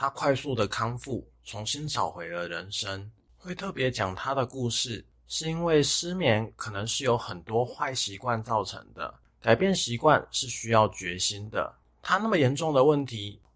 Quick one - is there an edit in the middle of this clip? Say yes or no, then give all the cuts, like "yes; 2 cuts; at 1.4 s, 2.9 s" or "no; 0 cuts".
no; 0 cuts